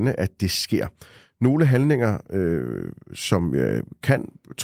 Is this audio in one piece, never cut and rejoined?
yes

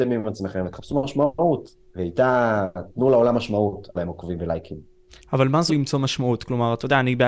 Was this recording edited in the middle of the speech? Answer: yes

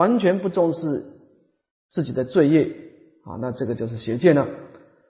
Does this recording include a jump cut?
no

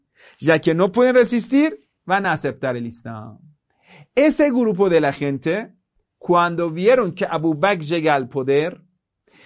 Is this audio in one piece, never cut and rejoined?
yes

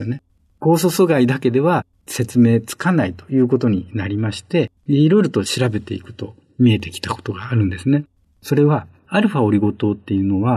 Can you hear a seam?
yes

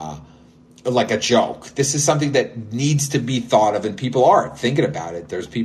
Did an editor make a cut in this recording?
no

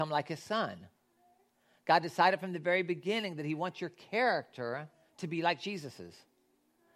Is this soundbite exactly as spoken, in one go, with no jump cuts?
yes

